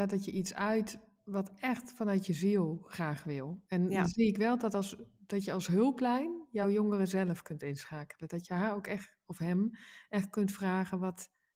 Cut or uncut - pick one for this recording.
uncut